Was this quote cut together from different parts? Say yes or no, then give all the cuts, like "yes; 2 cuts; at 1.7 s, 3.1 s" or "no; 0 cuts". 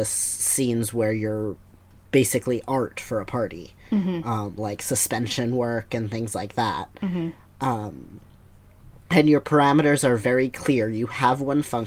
yes; 1 cut; at 9.0 s